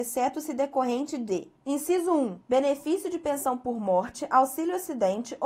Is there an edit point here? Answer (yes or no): yes